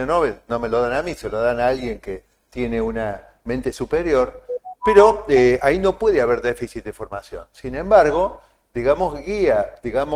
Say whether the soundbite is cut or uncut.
uncut